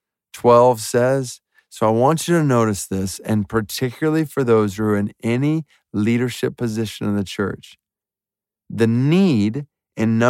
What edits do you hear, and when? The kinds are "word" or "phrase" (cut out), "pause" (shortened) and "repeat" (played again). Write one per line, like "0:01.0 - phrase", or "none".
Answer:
none